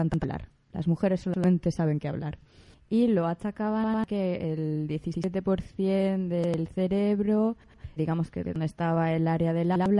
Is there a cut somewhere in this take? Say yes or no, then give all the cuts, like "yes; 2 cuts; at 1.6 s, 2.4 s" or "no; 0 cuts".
yes; 1 cut; at 8.0 s